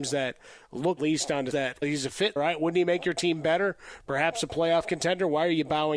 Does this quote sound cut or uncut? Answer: cut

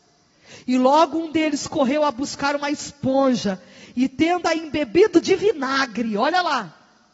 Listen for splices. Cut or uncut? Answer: uncut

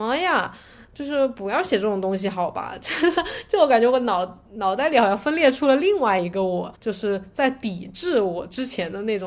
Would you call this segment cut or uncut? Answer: cut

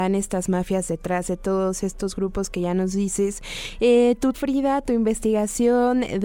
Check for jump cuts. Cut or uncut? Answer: cut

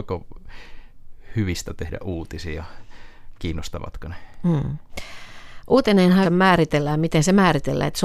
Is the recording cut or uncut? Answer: cut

